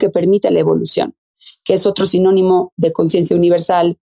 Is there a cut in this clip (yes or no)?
no